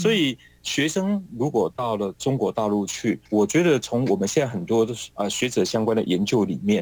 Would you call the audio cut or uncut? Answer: cut